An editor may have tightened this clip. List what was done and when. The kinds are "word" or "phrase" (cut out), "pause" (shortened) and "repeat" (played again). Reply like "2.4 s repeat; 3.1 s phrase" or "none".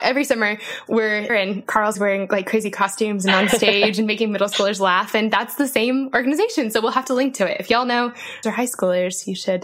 1.3 s word; 1.9 s word; 8.4 s phrase